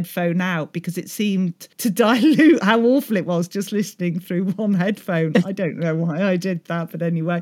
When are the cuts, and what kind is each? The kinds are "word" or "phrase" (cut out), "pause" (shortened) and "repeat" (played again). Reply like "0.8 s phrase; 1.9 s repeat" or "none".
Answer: 1.7 s pause

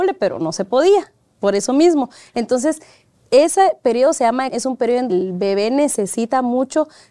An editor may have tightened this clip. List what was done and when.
4.5 s word; 5.1 s word

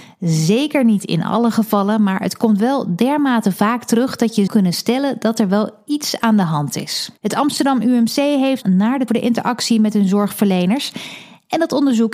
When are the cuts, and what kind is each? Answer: 4.5 s word; 7.2 s pause; 8.6 s phrase; 9.1 s phrase

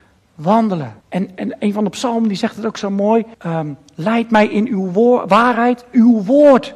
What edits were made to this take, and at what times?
1.0 s pause; 3.3 s pause

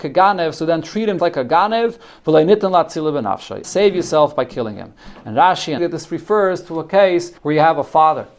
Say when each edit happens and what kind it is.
1.2 s word; 3.6 s phrase; 5.8 s phrase; 7.4 s pause

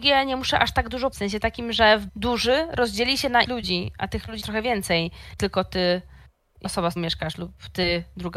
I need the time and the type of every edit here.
1.1 s word; 2.1 s phrase; 3.4 s word; 4.4 s word; 5.4 s word; 6.6 s word; 7.0 s word

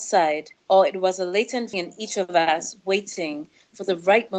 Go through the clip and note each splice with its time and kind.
1.7 s phrase

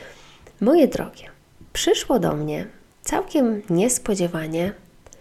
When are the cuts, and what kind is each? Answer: none

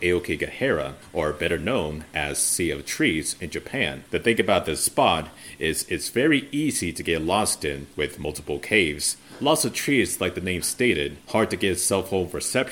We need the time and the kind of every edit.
none

